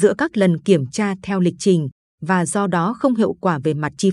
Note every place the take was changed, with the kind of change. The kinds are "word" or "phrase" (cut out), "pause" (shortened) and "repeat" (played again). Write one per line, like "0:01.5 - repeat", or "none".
none

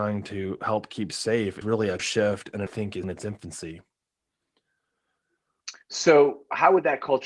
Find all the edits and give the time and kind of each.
0:01.6 - word
0:02.0 - word
0:02.7 - phrase
0:03.0 - word
0:05.8 - pause

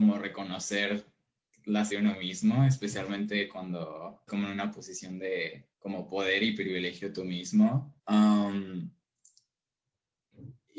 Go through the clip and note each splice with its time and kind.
0:01.9 - word
0:04.3 - word
0:05.7 - pause
0:08.0 - pause

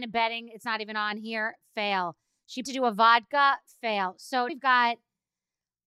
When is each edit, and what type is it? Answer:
0:02.6 - word
0:04.5 - word

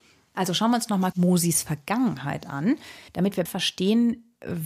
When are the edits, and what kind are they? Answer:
0:01.1 - word
0:03.1 - pause
0:03.5 - word

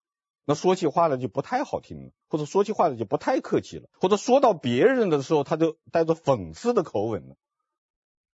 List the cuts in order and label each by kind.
0:02.2 - pause
0:03.9 - pause

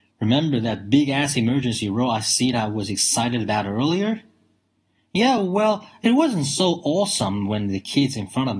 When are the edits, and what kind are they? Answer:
none

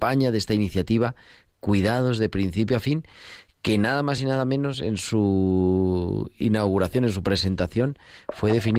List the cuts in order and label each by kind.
none

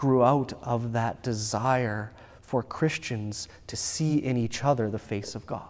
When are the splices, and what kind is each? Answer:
none

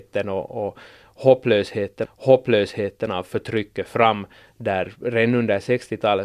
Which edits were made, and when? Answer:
0:02.0 - repeat

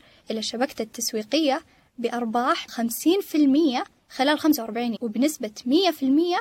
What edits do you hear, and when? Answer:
0:02.7 - word
0:05.0 - word

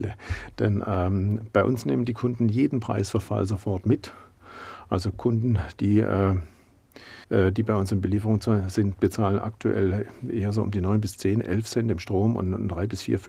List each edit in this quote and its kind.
0:07.2 - pause

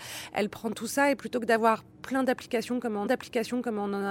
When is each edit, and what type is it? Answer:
0:03.1 - repeat

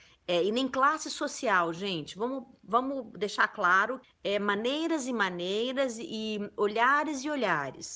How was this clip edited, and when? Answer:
0:04.0 - word

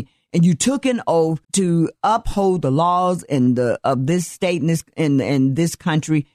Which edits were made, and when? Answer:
0:01.4 - pause

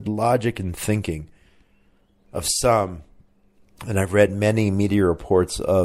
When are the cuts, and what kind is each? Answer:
none

